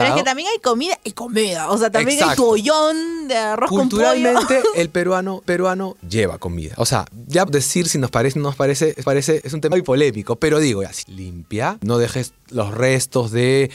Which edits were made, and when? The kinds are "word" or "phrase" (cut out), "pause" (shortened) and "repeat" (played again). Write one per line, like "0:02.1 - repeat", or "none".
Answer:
0:05.4 - repeat
0:07.5 - word
0:09.0 - repeat
0:09.7 - word
0:11.0 - word